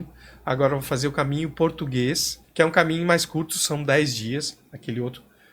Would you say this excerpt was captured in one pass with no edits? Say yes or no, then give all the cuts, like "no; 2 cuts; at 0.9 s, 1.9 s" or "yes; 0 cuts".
no; 1 cut; at 2.4 s